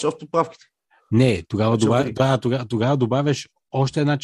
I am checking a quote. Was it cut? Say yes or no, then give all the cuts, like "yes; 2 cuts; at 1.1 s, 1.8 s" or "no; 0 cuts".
no; 0 cuts